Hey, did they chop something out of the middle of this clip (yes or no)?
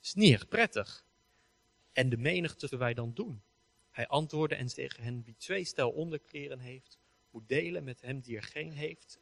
yes